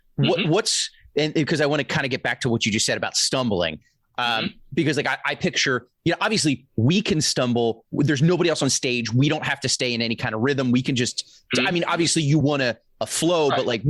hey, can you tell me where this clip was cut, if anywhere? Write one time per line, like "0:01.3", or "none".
none